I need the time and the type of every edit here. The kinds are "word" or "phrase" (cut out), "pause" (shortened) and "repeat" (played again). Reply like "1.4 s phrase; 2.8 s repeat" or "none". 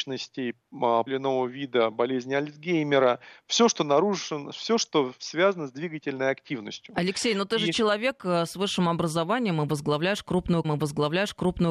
1.1 s phrase; 10.6 s repeat